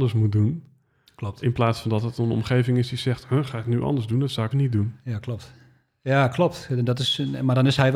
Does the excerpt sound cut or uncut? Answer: cut